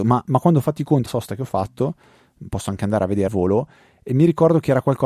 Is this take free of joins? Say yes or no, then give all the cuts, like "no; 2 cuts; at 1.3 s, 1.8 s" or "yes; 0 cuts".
no; 2 cuts; at 1.1 s, 3.3 s